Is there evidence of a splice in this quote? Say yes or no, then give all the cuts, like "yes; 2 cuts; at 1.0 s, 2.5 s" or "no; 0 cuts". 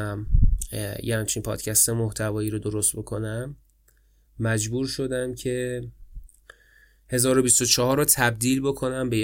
no; 0 cuts